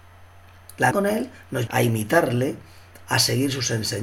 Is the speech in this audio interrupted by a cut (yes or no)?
yes